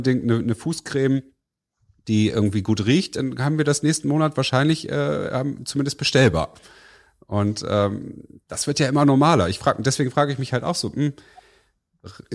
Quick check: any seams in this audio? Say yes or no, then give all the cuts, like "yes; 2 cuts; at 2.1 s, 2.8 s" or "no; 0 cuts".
no; 0 cuts